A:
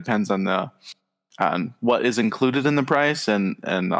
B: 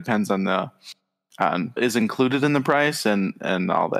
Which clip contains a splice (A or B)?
B